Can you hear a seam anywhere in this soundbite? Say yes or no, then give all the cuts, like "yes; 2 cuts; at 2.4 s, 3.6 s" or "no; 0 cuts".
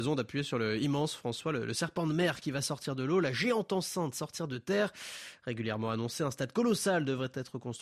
no; 0 cuts